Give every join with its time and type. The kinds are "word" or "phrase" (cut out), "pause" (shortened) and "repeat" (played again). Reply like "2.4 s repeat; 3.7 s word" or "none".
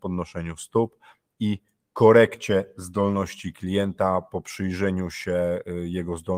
none